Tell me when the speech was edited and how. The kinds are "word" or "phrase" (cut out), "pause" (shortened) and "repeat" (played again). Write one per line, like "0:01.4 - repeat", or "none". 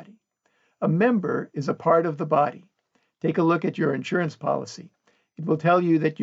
none